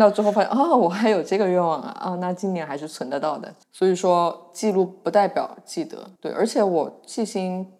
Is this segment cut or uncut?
cut